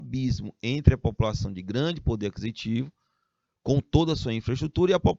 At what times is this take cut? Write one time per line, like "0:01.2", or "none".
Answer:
none